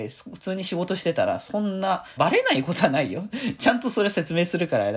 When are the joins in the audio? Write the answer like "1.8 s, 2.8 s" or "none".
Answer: 2.2 s